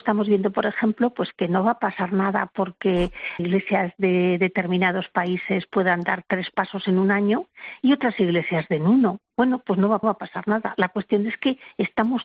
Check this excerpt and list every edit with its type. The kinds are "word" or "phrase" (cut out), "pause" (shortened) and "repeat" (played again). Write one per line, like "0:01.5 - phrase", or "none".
0:03.4 - word
0:10.0 - repeat